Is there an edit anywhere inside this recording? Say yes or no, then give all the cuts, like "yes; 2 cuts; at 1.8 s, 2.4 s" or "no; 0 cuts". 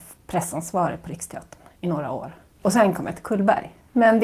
yes; 1 cut; at 2.5 s